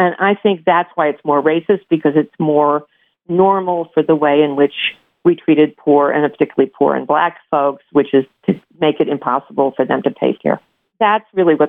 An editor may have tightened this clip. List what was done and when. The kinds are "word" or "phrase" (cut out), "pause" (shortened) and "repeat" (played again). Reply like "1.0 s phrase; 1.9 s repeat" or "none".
10.4 s phrase